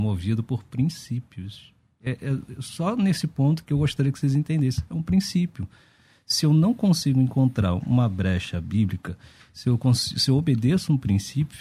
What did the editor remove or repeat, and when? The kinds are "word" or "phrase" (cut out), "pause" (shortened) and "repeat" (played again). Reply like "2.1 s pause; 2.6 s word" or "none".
3.6 s word